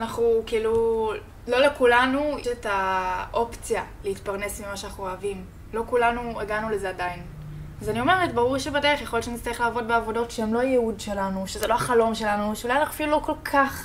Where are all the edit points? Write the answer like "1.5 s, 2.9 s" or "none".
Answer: 2.4 s